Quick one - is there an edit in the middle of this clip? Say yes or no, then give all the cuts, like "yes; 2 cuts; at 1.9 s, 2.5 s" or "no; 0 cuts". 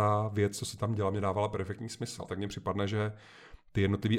yes; 1 cut; at 2.3 s